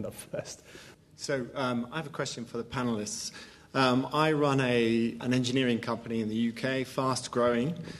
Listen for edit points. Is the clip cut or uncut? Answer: cut